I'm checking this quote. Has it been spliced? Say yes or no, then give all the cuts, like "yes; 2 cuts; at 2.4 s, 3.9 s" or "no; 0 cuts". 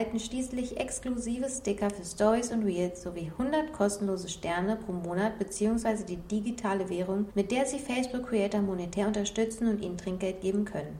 no; 0 cuts